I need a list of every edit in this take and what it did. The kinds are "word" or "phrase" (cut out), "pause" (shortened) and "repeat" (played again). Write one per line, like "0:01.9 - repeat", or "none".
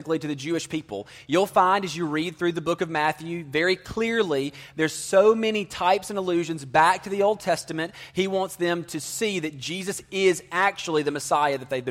none